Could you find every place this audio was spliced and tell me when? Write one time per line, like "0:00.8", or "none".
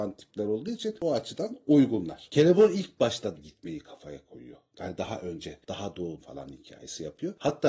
0:03.4
0:05.0
0:06.2